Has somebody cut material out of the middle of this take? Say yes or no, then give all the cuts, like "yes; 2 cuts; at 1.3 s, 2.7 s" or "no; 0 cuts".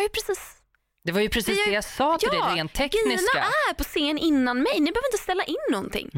no; 0 cuts